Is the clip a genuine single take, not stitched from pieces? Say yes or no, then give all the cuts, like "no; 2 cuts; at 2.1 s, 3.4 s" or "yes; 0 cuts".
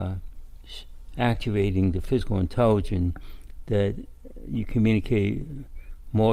yes; 0 cuts